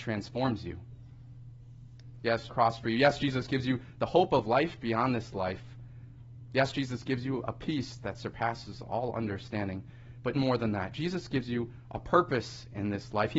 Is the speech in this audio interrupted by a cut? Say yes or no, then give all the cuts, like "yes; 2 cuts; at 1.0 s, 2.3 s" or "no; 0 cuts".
yes; 2 cuts; at 2.5 s, 10.3 s